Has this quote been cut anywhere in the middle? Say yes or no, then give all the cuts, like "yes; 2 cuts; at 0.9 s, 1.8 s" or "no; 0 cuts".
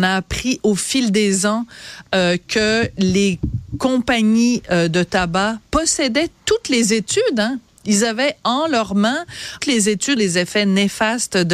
yes; 3 cuts; at 5.7 s, 9.6 s, 10.2 s